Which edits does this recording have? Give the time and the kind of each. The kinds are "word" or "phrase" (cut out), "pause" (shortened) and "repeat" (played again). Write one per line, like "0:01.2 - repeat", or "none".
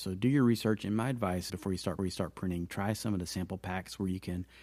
0:01.5 - word
0:02.0 - repeat